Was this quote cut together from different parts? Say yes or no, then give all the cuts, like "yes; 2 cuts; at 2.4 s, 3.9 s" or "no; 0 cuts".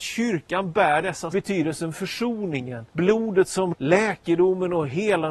yes; 3 cuts; at 1.3 s, 2.9 s, 3.7 s